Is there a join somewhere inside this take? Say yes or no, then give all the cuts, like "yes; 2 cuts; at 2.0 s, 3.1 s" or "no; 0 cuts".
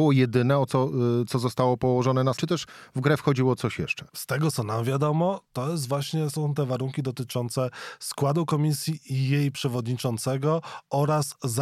yes; 3 cuts; at 2.4 s, 4.1 s, 6.3 s